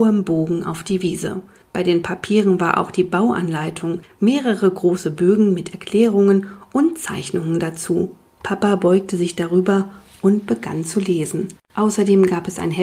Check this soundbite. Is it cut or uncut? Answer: uncut